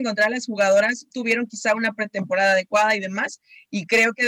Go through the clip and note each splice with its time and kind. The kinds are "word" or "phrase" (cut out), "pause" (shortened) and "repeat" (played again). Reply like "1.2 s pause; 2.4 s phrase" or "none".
1.1 s phrase